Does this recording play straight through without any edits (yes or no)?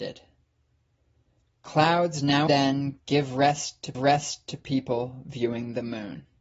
no